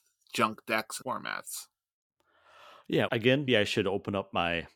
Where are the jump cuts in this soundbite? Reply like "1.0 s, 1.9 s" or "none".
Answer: 1.0 s, 3.1 s, 3.5 s